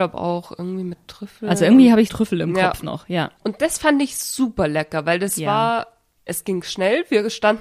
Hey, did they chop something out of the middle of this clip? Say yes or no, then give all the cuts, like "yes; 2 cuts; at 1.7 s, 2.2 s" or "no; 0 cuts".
yes; 3 cuts; at 2.1 s, 3.4 s, 6.3 s